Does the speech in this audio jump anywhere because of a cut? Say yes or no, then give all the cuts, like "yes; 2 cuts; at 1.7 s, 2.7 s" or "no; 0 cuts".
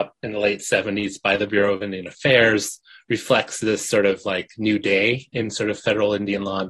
no; 0 cuts